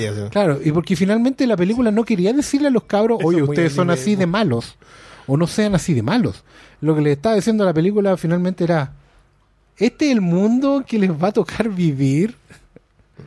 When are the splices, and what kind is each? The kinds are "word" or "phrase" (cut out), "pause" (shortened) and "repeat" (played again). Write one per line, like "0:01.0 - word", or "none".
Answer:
none